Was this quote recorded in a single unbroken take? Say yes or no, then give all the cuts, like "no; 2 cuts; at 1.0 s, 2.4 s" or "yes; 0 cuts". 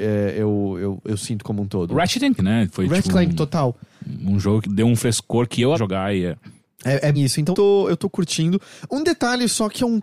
no; 7 cuts; at 1.0 s, 2.4 s, 3.0 s, 4.6 s, 5.7 s, 7.1 s, 7.5 s